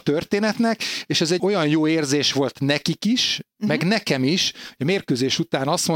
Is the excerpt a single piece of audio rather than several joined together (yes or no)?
no